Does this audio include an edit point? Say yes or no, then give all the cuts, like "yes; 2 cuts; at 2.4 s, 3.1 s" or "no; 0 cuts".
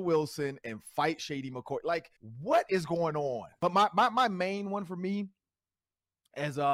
yes; 1 cut; at 2.2 s